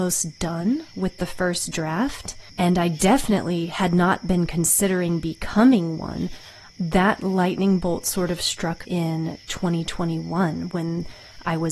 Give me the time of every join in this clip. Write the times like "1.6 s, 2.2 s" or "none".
2.5 s, 8.8 s